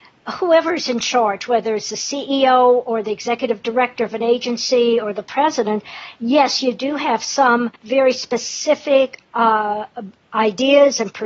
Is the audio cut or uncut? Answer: cut